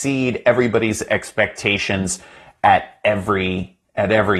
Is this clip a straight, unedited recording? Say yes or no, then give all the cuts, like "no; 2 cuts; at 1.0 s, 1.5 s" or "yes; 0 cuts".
yes; 0 cuts